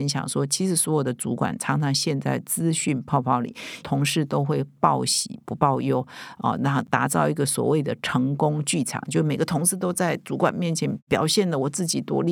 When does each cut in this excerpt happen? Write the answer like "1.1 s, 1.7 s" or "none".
3.8 s